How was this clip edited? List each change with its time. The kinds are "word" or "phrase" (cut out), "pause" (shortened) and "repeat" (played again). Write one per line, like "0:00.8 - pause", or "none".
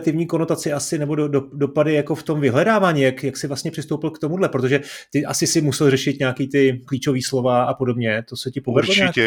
0:06.8 - word

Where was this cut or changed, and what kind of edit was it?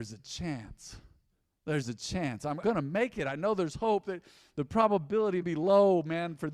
0:02.6 - word
0:05.4 - word

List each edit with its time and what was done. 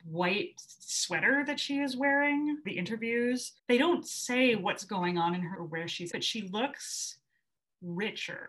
0:02.6 - word
0:03.6 - pause
0:05.5 - word
0:06.1 - word

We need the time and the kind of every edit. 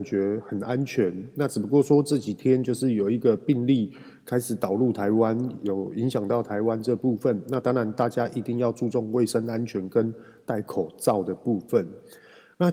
none

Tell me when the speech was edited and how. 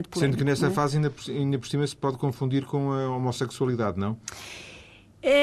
none

